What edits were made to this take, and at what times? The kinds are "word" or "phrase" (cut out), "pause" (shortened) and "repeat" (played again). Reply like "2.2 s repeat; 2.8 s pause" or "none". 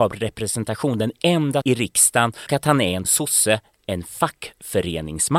1.6 s word; 2.5 s word; 3.0 s word